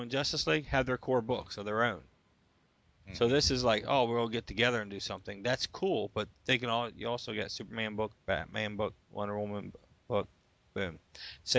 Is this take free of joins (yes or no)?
yes